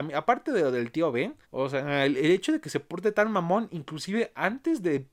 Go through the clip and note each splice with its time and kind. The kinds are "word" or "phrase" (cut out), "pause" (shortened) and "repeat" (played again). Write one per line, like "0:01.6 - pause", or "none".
0:01.4 - pause